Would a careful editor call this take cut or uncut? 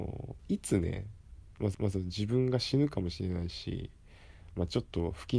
cut